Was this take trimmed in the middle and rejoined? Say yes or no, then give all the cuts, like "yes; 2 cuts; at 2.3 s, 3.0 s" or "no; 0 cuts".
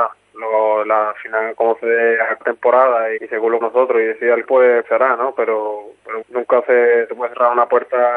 yes; 6 cuts; at 2.4 s, 3.2 s, 3.6 s, 4.5 s, 4.8 s, 6.2 s